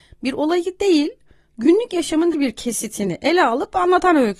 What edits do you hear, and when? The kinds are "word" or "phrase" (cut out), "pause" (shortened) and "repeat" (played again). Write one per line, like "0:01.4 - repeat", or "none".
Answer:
0:02.3 - word